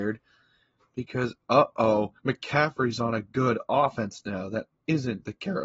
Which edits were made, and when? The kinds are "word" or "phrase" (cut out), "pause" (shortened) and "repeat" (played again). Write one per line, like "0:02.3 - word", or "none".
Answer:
0:02.2 - pause